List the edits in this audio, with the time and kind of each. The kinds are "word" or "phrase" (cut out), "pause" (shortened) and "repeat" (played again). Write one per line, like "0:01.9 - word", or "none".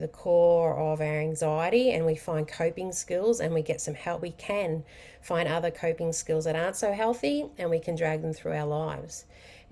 0:04.2 - phrase